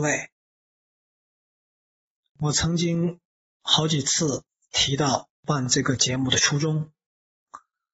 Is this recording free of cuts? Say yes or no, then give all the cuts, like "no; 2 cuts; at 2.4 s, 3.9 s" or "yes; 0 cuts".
yes; 0 cuts